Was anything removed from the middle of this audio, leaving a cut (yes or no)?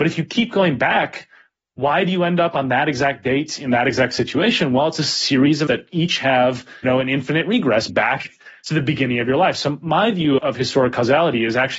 yes